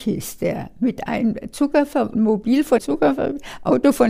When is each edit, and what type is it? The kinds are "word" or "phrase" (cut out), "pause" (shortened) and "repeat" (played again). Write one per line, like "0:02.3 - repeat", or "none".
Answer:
0:02.1 - word
0:02.8 - word